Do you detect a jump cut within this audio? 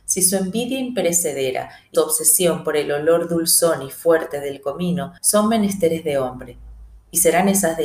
yes; 2 cuts; at 1.9 s, 5.2 s

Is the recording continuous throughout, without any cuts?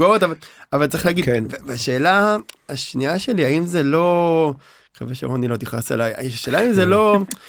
yes; 0 cuts

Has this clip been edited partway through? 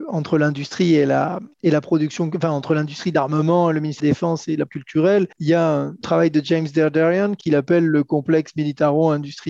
yes; 6 cuts; at 1.5 s, 4.0 s, 4.7 s, 5.3 s, 6.0 s, 7.4 s

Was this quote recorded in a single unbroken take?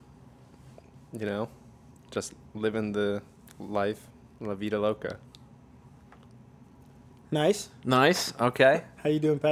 yes; 0 cuts

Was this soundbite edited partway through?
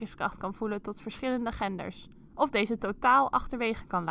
no; 0 cuts

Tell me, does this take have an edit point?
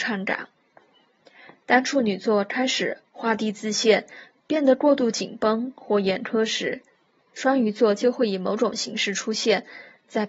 no; 0 cuts

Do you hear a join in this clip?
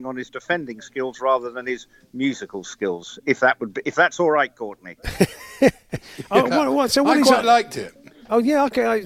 no; 0 cuts

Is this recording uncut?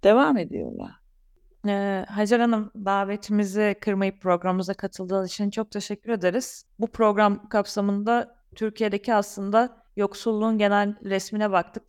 yes; 0 cuts

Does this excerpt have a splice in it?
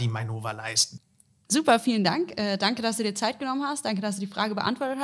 no; 0 cuts

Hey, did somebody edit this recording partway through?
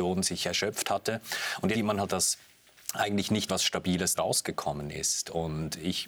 yes; 4 cuts; at 1.7 s, 2.1 s, 3.5 s, 4.2 s

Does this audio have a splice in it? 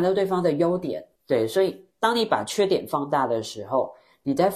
yes; 2 cuts; at 1.2 s, 1.9 s

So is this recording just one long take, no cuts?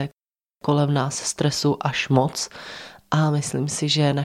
yes; 0 cuts

